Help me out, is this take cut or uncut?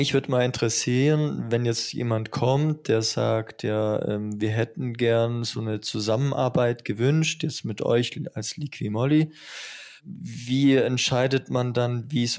cut